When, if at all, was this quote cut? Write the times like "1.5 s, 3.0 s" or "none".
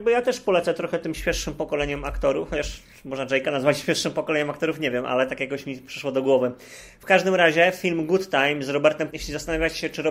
9.1 s